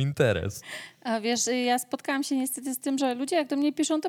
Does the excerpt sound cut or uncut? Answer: uncut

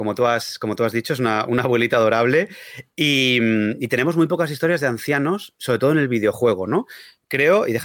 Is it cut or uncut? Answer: uncut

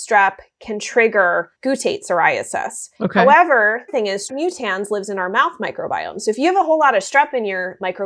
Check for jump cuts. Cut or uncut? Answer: cut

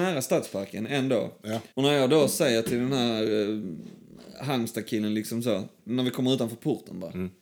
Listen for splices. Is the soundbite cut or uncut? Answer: cut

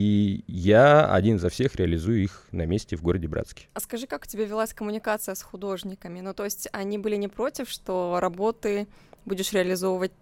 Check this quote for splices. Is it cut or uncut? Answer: cut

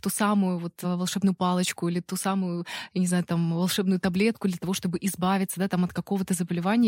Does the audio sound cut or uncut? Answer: uncut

